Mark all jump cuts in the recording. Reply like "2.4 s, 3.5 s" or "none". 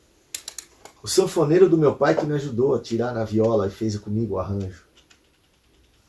1.0 s